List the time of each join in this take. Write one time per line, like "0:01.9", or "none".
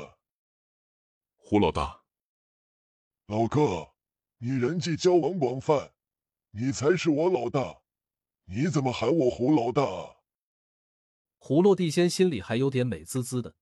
none

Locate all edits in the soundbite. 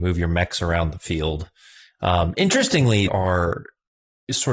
0:03.1

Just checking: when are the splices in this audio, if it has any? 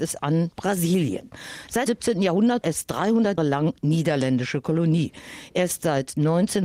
0:01.9
0:02.6
0:03.4

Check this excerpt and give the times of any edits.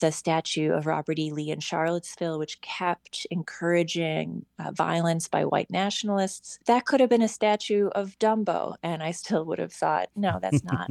0:06.6

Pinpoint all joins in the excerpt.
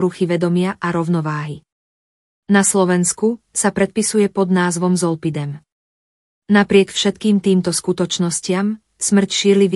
none

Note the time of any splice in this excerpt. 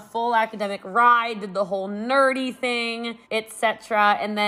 0:03.2

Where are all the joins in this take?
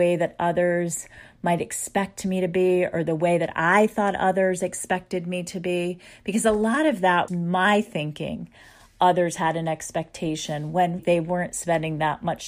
0:07.3
0:11.0

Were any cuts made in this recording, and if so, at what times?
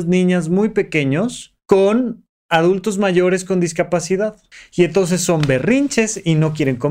0:01.6
0:04.5

